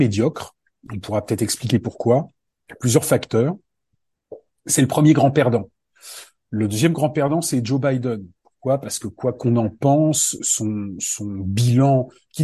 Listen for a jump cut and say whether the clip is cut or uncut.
uncut